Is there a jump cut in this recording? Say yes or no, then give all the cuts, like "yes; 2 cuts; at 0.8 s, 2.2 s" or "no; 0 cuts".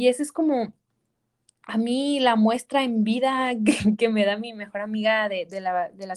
no; 0 cuts